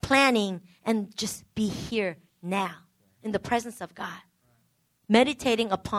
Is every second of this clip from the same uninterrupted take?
yes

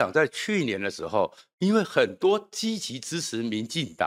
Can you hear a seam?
no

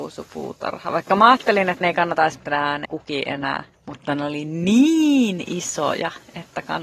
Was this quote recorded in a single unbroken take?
no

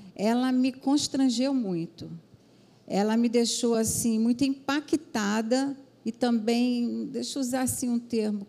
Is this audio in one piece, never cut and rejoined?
yes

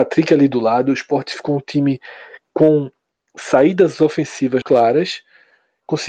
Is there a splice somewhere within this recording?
yes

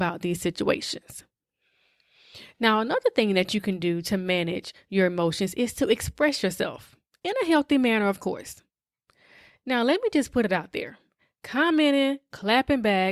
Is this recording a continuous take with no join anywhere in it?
yes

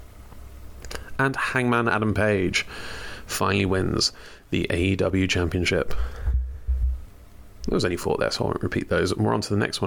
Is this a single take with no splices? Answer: yes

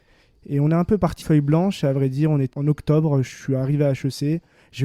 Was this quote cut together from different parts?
yes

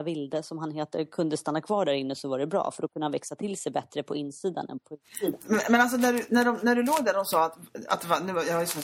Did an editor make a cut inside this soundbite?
no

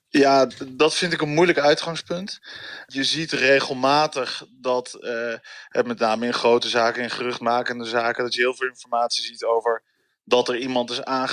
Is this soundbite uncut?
yes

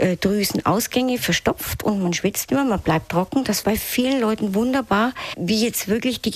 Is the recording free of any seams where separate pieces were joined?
no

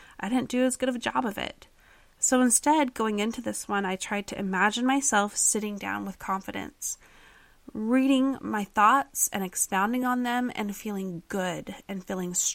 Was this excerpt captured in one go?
yes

